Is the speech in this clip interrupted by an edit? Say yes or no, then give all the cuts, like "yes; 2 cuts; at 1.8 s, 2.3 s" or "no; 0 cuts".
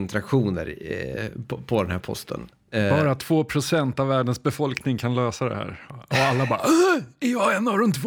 no; 0 cuts